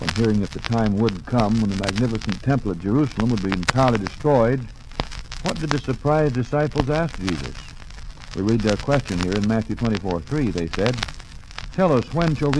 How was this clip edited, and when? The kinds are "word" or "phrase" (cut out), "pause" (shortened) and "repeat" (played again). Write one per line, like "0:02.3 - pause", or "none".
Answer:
none